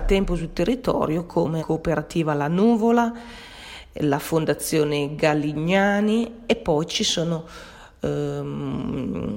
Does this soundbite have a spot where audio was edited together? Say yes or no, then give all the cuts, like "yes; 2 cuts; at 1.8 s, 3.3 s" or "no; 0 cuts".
yes; 1 cut; at 1.6 s